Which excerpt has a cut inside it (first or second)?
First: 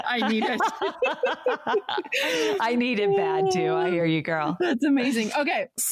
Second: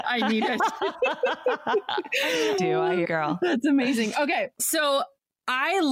second